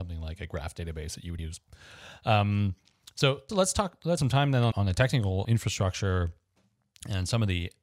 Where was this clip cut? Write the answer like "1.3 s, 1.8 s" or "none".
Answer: 1.4 s, 3.5 s, 4.2 s, 4.7 s, 5.4 s